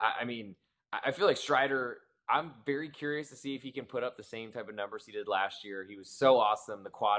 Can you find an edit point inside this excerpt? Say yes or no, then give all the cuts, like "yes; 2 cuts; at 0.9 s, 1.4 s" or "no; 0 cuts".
no; 0 cuts